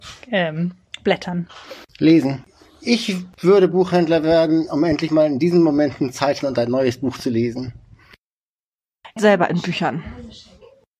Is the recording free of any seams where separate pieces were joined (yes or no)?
no